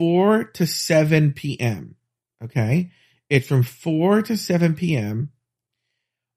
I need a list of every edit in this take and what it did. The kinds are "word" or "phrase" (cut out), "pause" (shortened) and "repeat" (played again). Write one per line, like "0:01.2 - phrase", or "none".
none

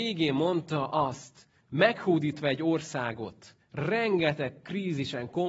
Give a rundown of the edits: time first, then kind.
0:03.6 - pause

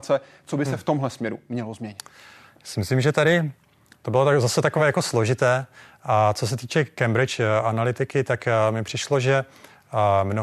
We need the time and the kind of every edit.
none

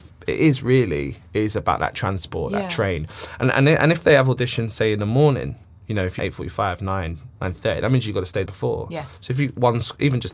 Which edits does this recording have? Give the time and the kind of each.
0:01.3 - pause
0:06.2 - phrase
0:07.4 - pause
0:08.5 - word

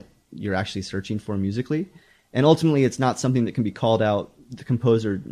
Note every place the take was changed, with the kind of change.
none

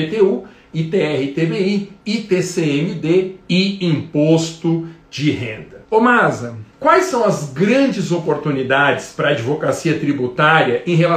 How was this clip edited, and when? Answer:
0:05.8 - pause
0:06.7 - pause

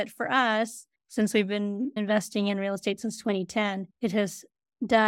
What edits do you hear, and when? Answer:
0:01.0 - pause
0:03.9 - pause

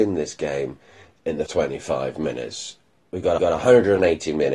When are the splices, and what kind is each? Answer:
0:01.5 - word
0:03.4 - repeat

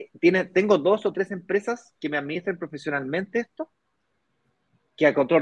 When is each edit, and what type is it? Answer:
none

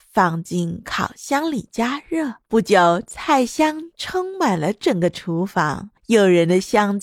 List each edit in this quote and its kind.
0:06.0 - pause

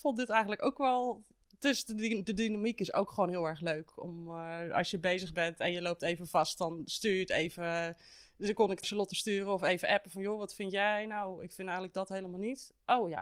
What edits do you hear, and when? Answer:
0:08.8 - phrase

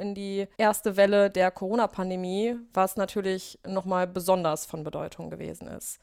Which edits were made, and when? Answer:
none

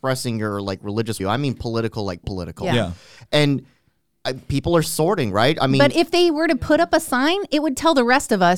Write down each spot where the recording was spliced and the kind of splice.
0:01.2 - word
0:02.2 - word
0:04.8 - word

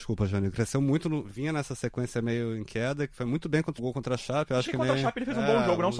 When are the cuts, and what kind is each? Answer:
0:01.3 - word
0:03.1 - word
0:03.8 - phrase

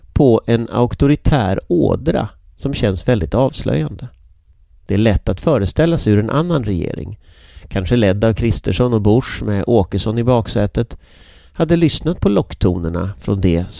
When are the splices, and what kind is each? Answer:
none

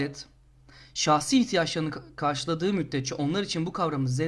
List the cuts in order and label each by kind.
none

